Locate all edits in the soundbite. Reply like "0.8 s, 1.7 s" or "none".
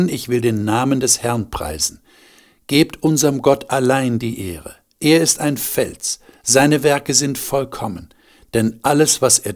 none